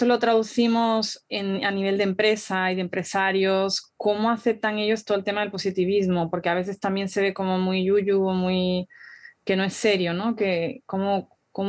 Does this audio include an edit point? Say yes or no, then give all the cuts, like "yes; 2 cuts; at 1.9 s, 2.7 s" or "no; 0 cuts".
no; 0 cuts